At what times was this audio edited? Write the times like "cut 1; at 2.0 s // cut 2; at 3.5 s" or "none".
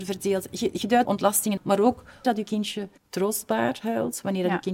cut 1; at 1.1 s // cut 2; at 1.6 s // cut 3; at 2.2 s // cut 4; at 3.0 s